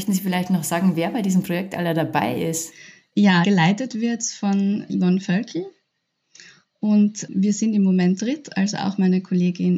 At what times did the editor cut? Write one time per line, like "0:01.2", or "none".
0:03.4
0:08.2